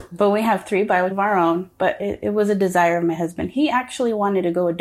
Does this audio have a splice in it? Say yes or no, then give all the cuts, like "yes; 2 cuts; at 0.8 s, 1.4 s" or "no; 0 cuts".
yes; 1 cut; at 1.1 s